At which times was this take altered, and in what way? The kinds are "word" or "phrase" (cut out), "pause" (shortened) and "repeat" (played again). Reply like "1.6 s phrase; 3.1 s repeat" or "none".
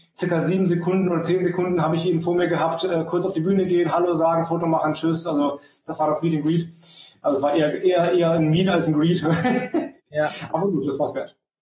10.0 s pause